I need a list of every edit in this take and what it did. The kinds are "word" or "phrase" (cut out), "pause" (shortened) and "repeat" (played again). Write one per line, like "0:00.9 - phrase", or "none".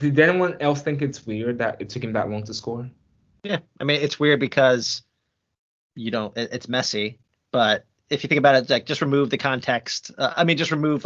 none

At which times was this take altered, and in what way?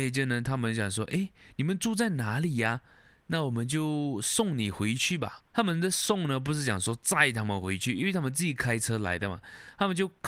0:05.5 - pause

